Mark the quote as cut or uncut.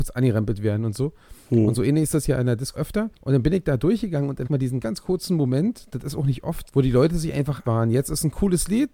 cut